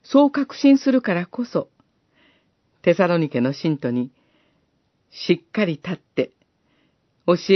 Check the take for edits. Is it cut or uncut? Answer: uncut